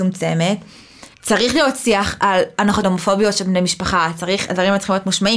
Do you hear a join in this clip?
yes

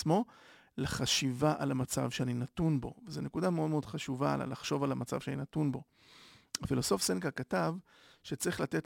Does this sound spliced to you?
no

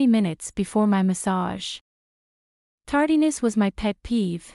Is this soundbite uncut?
yes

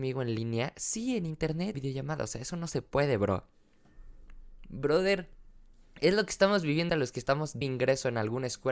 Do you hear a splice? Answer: yes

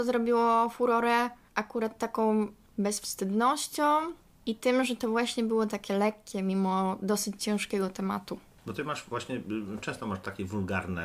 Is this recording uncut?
yes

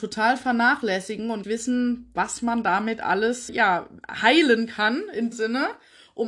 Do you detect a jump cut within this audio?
yes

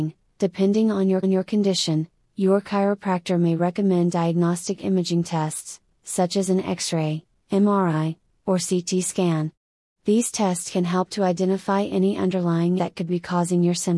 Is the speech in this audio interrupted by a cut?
yes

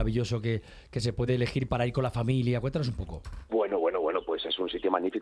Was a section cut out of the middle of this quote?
no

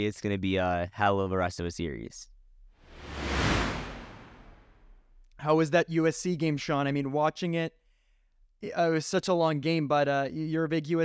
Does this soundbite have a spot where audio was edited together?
no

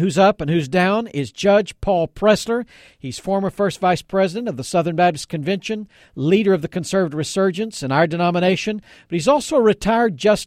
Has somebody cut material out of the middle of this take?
no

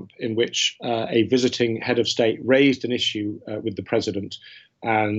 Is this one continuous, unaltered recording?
yes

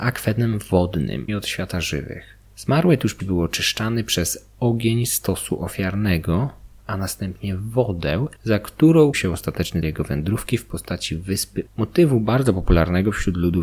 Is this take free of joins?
no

